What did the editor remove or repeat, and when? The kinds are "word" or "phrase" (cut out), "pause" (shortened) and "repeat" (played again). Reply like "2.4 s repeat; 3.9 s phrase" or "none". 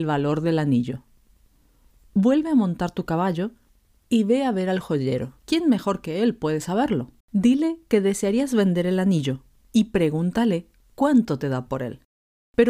5.4 s pause; 7.2 s pause